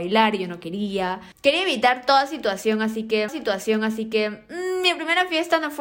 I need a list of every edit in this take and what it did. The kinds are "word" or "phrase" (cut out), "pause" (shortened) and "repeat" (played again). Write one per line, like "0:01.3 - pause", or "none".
0:03.3 - repeat